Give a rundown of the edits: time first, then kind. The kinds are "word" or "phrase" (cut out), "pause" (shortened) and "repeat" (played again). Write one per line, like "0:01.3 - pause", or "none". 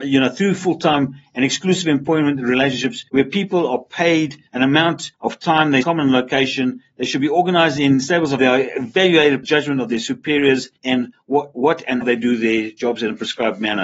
0:03.1 - pause
0:04.5 - pause
0:05.1 - pause
0:05.8 - phrase
0:08.4 - phrase
0:09.4 - phrase
0:10.8 - pause
0:12.0 - word